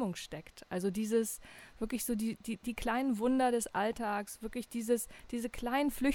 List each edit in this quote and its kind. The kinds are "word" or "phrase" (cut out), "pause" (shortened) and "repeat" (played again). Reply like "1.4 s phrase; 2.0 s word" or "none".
none